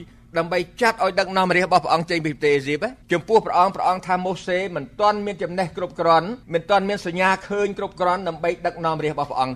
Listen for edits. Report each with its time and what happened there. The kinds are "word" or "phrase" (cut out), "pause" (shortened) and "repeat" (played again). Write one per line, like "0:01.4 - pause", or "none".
0:03.0 - pause
0:06.4 - pause